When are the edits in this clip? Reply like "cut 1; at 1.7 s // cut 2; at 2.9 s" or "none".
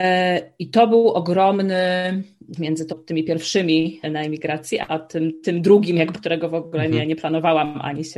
cut 1; at 2.6 s // cut 2; at 2.9 s // cut 3; at 4.0 s // cut 4; at 4.9 s // cut 5; at 6.1 s

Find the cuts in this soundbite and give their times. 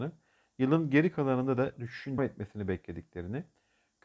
cut 1; at 1.7 s // cut 2; at 2.2 s

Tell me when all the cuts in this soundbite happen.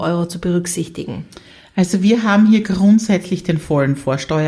none

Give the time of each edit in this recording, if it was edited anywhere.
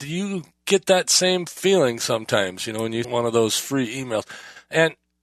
cut 1; at 3.0 s

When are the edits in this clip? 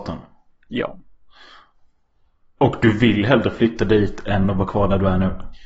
none

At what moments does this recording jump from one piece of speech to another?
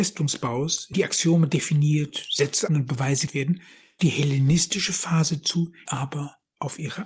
cut 1; at 0.9 s // cut 2; at 2.7 s // cut 3; at 3.3 s // cut 4; at 4.0 s // cut 5; at 5.9 s

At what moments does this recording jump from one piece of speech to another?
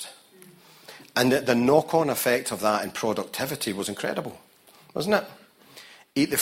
none

